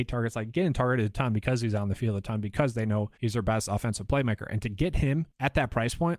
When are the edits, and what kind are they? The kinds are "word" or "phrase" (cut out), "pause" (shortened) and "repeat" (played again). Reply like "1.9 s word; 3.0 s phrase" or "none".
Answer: 3.1 s pause